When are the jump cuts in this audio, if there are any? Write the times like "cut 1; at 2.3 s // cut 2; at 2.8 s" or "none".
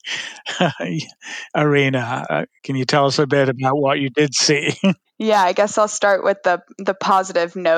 cut 1; at 2.6 s